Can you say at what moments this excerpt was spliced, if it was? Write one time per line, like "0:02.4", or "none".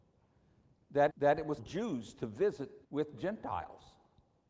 0:01.1
0:01.6
0:02.8